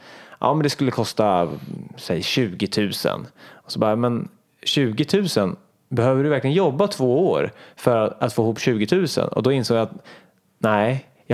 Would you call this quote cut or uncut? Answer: uncut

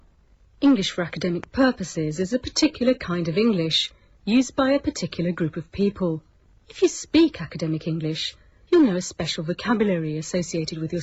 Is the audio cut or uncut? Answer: uncut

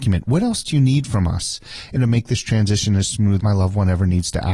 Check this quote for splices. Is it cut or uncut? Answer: cut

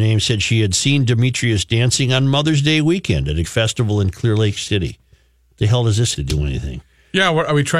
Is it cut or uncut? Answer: cut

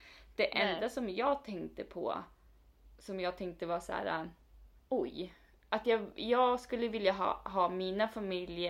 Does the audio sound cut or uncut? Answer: cut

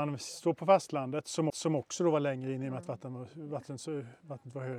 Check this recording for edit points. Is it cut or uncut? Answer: cut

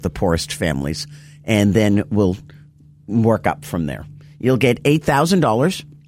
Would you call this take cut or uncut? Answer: uncut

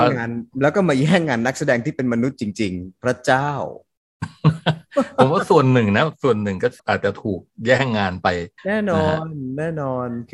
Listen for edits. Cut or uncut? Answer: cut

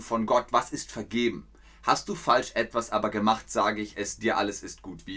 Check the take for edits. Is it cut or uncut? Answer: uncut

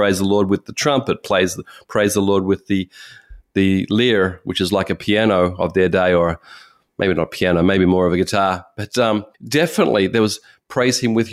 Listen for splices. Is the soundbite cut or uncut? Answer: cut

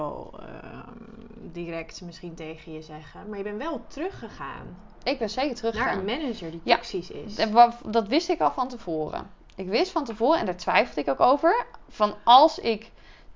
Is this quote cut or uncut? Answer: uncut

